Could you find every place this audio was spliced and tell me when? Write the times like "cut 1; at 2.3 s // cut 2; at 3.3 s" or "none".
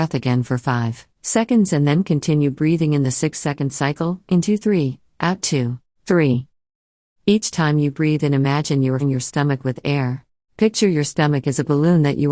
cut 1; at 1.1 s // cut 2; at 5.9 s // cut 3; at 9.0 s // cut 4; at 10.4 s

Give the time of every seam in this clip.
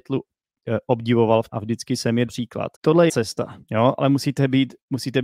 cut 1; at 1.5 s // cut 2; at 2.3 s // cut 3; at 2.7 s // cut 4; at 3.1 s // cut 5; at 3.6 s

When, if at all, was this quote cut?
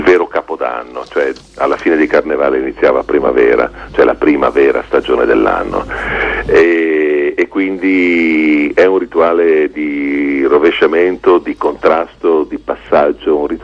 none

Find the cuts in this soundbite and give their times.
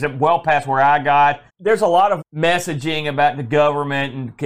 cut 1; at 1.5 s // cut 2; at 2.2 s

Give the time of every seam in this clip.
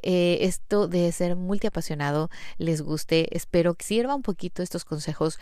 cut 1; at 3.8 s

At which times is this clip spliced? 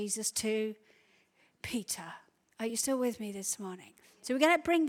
none

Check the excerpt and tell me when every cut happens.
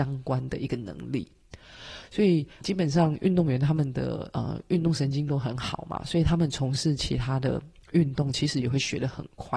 cut 1; at 2.6 s

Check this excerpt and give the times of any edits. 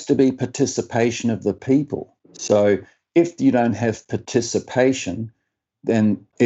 cut 1; at 2.2 s

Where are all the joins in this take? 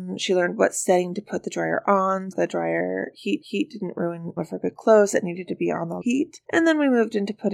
cut 1; at 2.3 s // cut 2; at 3.4 s // cut 3; at 4.4 s // cut 4; at 6.0 s // cut 5; at 6.4 s

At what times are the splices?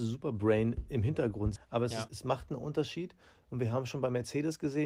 cut 1; at 1.6 s // cut 2; at 2.1 s

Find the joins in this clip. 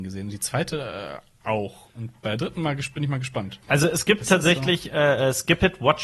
cut 1; at 3.6 s

